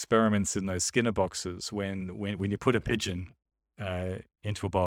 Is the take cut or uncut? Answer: uncut